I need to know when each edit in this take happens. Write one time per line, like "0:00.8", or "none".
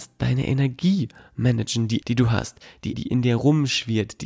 0:02.0
0:02.9